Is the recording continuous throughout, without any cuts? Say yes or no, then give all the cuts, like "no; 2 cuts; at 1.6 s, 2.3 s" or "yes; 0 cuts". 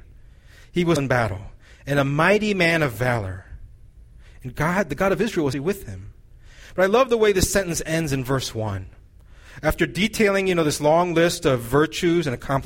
no; 2 cuts; at 1.0 s, 5.5 s